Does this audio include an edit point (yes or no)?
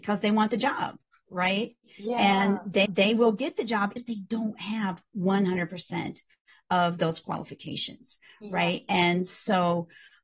yes